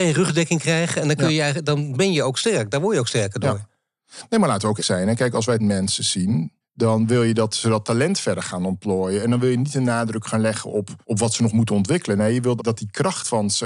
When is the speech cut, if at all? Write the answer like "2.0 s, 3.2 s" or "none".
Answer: 4.8 s, 5.6 s, 6.6 s, 11.0 s, 12.6 s